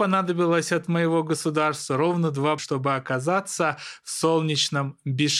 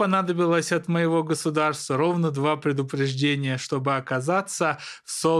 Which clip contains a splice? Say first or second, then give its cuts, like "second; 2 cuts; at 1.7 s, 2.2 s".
first; 1 cut; at 2.6 s